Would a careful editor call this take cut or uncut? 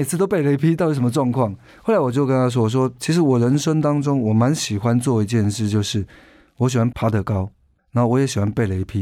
uncut